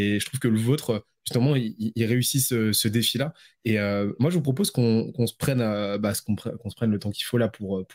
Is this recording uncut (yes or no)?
yes